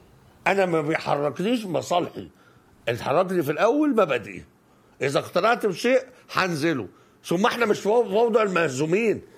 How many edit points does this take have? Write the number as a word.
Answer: zero